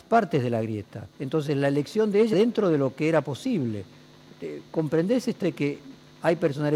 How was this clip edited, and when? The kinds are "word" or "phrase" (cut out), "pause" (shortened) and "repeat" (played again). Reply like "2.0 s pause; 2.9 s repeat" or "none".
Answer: 1.1 s pause; 2.3 s word; 5.4 s word